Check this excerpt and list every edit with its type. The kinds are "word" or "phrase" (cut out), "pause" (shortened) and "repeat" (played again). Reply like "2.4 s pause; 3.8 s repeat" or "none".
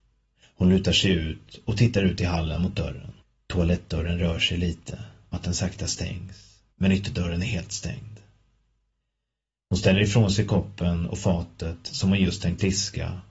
3.2 s pause; 5.3 s word; 6.7 s pause